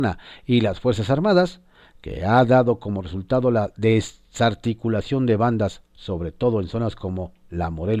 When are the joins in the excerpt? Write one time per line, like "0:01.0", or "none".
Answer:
none